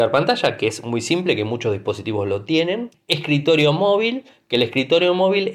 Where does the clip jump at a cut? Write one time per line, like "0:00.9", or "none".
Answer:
0:02.9